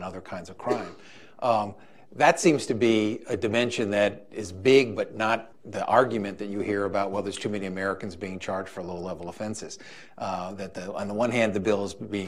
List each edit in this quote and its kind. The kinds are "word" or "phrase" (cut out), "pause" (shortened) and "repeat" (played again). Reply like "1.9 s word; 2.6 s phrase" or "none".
5.5 s word